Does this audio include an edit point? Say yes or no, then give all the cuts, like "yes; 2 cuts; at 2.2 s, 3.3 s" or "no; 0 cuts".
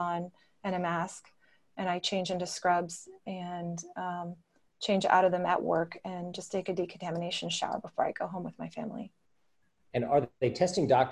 no; 0 cuts